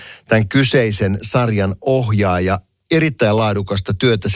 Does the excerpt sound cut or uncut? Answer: uncut